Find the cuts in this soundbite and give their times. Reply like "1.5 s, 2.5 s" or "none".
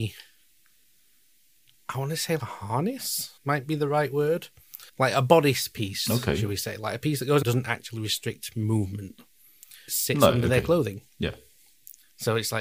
2.4 s, 3.4 s, 4.9 s, 7.4 s, 9.9 s

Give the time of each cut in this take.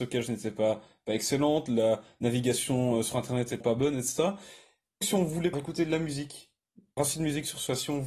3.6 s, 5.0 s, 5.5 s, 7.0 s

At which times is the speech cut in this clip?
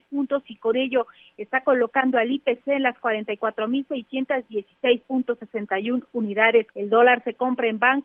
6.7 s

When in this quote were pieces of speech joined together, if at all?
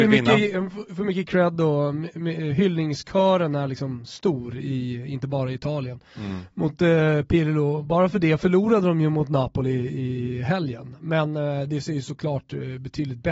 none

